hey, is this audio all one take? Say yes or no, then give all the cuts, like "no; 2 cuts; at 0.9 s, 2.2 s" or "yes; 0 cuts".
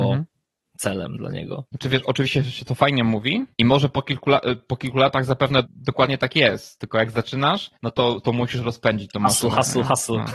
no; 4 cuts; at 1.7 s, 3.5 s, 5.6 s, 7.8 s